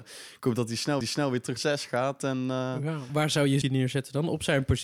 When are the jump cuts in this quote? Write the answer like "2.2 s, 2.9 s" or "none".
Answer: 1.0 s, 1.6 s, 3.1 s, 3.6 s